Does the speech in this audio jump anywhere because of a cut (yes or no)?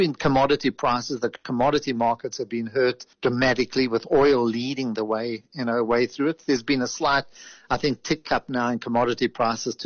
yes